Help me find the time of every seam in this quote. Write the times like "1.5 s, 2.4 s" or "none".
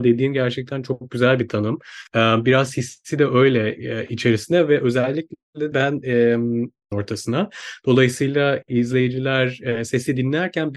2.1 s, 5.7 s, 6.9 s